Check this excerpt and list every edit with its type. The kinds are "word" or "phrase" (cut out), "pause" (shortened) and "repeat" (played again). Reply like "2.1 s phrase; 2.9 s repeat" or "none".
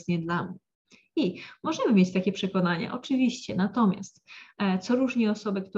none